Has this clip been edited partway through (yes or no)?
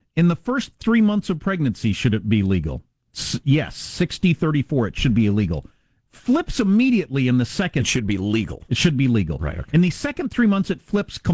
no